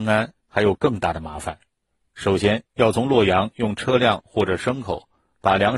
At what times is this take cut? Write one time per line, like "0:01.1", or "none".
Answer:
none